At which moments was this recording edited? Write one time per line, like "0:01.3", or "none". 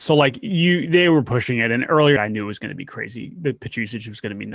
0:02.2